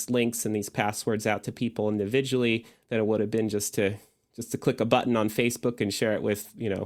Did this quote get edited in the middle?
no; 0 cuts

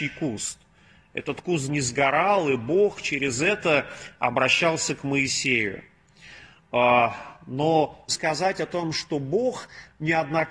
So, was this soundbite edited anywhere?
yes; 2 cuts; at 1.7 s, 8.1 s

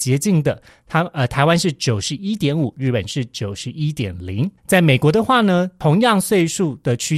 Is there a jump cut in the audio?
yes; 1 cut; at 4.6 s

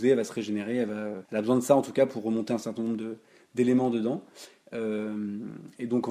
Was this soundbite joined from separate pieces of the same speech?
yes; 1 cut; at 1.2 s

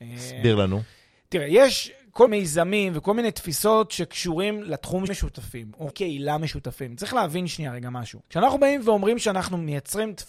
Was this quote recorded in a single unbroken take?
no; 4 cuts; at 2.3 s, 5.1 s, 5.9 s, 8.2 s

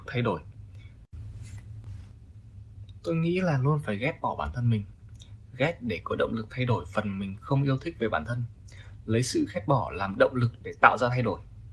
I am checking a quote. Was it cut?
no; 0 cuts

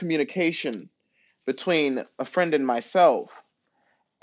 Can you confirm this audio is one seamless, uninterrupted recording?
yes; 0 cuts

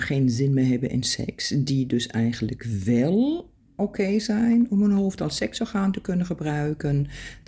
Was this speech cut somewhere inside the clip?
no; 0 cuts

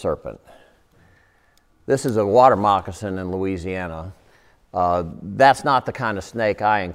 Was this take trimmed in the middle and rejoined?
no; 0 cuts

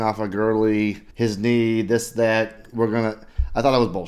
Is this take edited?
yes; 1 cut; at 1.1 s

